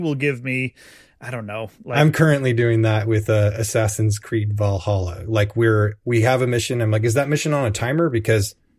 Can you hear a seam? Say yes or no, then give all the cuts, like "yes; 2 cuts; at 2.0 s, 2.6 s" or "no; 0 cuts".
no; 0 cuts